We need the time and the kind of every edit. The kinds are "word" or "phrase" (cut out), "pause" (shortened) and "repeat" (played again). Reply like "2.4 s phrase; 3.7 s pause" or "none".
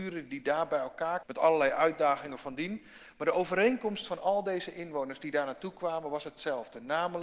1.2 s word